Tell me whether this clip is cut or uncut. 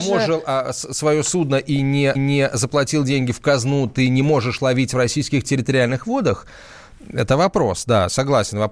cut